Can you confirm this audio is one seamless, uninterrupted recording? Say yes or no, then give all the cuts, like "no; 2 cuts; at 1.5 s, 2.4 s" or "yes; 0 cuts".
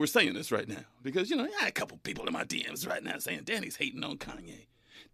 yes; 0 cuts